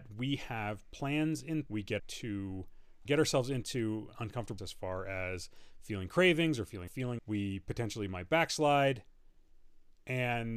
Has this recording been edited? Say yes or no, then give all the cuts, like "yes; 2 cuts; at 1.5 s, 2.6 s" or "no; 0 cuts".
yes; 6 cuts; at 1.7 s, 2.0 s, 3.1 s, 4.6 s, 6.9 s, 7.2 s